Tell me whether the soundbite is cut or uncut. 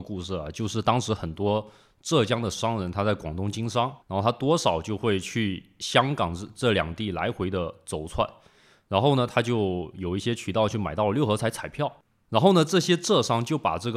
cut